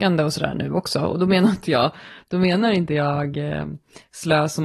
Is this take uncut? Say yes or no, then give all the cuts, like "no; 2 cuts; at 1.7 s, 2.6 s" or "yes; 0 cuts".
yes; 0 cuts